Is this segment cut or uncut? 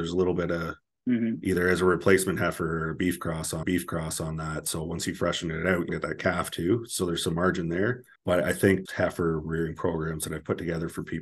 cut